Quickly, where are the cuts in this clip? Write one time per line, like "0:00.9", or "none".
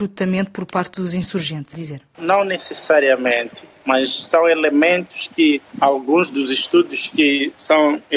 0:01.7
0:05.7